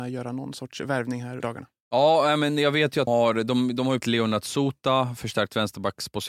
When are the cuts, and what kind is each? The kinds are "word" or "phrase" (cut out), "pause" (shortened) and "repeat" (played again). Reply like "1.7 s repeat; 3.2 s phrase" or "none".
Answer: 1.4 s word; 3.1 s word; 4.0 s word